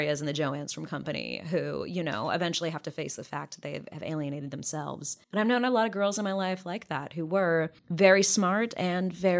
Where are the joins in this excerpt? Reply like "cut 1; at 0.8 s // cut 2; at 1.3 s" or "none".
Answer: cut 1; at 5.2 s // cut 2; at 7.8 s

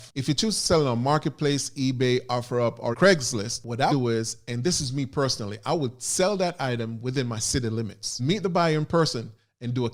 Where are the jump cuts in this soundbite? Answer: cut 1; at 2.9 s // cut 2; at 3.9 s // cut 3; at 8.2 s

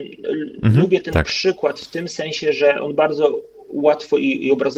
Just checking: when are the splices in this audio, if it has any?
none

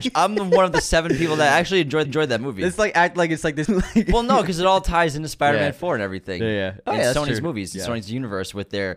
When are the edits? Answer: cut 1; at 2.0 s // cut 2; at 3.6 s

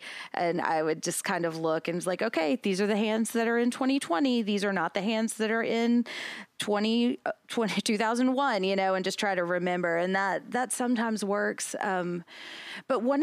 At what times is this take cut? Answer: cut 1; at 6.5 s

